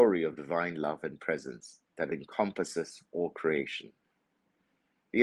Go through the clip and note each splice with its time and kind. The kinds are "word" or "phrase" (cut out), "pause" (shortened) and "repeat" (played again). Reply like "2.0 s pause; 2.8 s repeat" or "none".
1.9 s pause

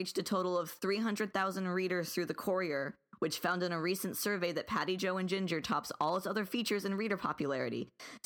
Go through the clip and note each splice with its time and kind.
none

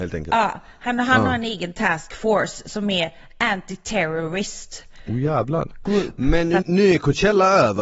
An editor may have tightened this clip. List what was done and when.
6.6 s word

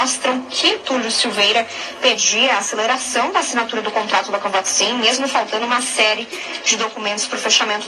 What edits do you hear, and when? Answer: none

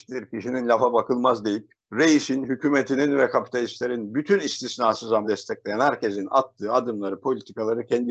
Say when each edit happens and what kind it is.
1.8 s pause; 5.2 s word

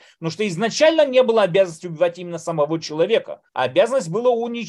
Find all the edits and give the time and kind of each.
3.5 s pause

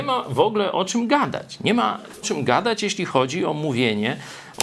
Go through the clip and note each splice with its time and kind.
2.2 s word

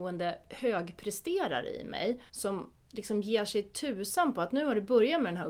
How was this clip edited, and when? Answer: 2.3 s pause

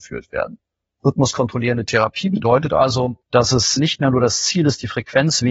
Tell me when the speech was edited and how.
3.2 s pause

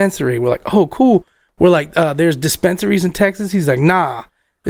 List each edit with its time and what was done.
none

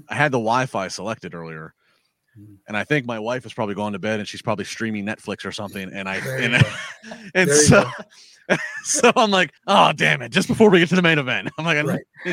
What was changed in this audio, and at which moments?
9.6 s pause

